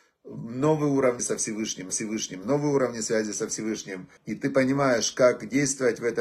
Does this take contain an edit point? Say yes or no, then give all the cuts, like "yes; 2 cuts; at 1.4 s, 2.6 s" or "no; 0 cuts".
yes; 3 cuts; at 1.2 s, 1.9 s, 4.2 s